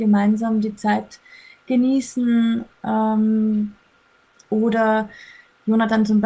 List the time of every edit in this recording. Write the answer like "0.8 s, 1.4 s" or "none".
none